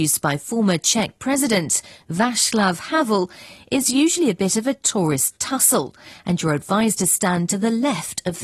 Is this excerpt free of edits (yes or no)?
yes